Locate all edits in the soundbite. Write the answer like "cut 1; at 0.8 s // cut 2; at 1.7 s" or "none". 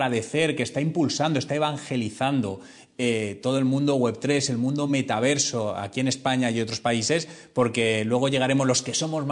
none